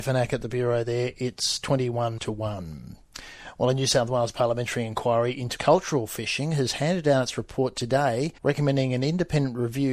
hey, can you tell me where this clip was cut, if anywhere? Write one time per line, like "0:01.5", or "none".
0:02.2
0:05.6
0:08.4

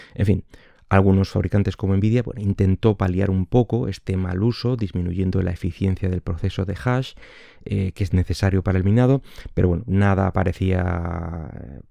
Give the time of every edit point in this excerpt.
none

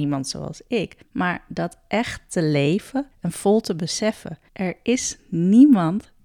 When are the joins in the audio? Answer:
0:01.0
0:03.1
0:04.5

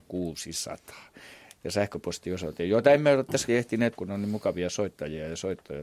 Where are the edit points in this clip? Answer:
0:03.5
0:03.9

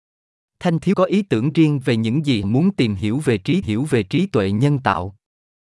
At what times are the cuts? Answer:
0:00.9
0:02.4
0:03.6

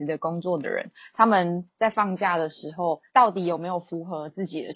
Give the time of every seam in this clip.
0:03.1

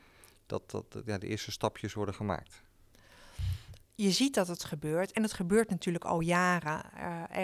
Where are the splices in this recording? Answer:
0:03.8

